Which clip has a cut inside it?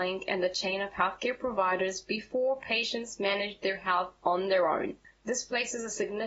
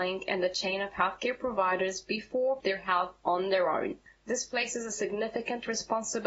second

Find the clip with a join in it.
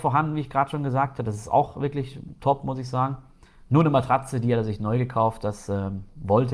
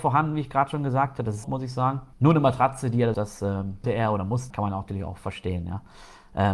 second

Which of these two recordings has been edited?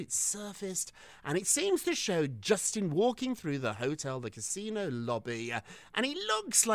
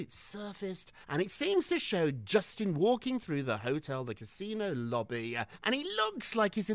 second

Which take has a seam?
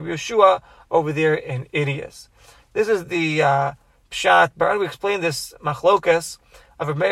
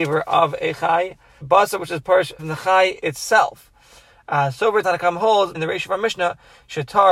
second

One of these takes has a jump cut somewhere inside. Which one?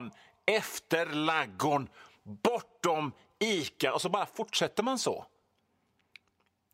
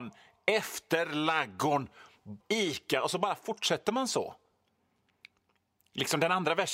second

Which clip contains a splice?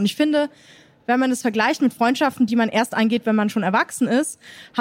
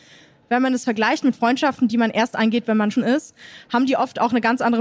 second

